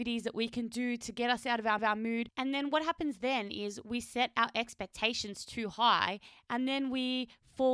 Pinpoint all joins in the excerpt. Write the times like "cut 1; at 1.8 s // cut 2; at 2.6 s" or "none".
cut 1; at 1.8 s